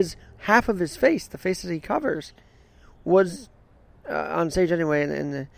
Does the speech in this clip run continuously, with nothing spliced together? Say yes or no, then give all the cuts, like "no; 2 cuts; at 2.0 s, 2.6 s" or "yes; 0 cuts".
yes; 0 cuts